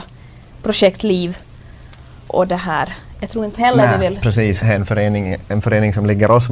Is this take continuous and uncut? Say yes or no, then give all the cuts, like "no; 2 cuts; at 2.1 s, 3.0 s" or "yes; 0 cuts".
no; 3 cuts; at 2.3 s, 3.6 s, 4.6 s